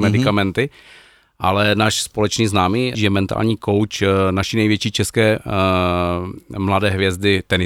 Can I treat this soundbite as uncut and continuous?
no; 1 cut; at 2.9 s

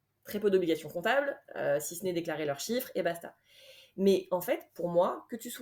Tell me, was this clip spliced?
no; 0 cuts

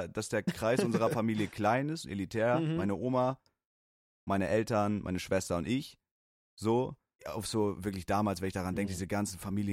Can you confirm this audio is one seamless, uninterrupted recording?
no; 1 cut; at 7.2 s

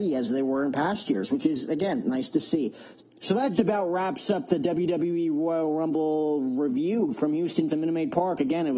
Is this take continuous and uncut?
no; 2 cuts; at 3.5 s, 7.7 s

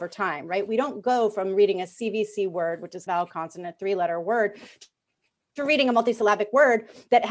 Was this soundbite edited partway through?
yes; 1 cut; at 3.1 s

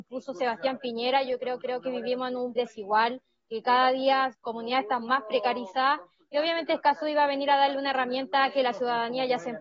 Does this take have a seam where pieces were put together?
yes; 3 cuts; at 1.6 s, 2.6 s, 4.3 s

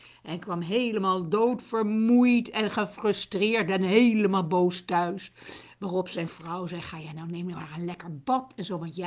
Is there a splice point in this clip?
no; 0 cuts

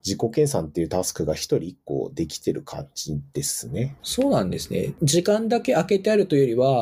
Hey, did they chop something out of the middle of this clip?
yes; 1 cut; at 4.0 s

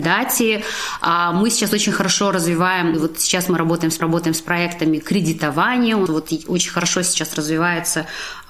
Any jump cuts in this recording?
yes; 3 cuts; at 2.9 s, 4.0 s, 6.1 s

